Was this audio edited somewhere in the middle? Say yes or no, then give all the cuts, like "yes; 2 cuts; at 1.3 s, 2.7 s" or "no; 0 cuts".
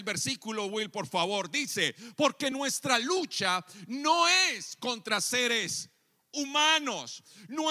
no; 0 cuts